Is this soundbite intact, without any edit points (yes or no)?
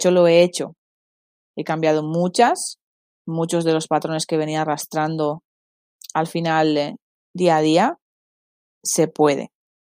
yes